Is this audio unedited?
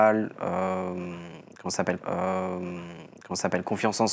no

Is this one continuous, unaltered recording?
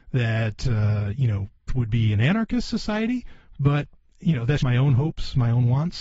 no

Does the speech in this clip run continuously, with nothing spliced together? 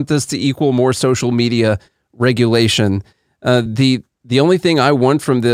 yes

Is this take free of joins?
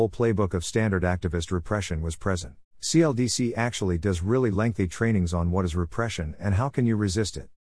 no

